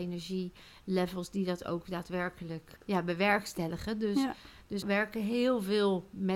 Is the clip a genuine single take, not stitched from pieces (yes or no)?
no